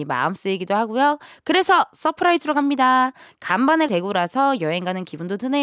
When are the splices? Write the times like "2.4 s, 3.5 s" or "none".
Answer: 3.9 s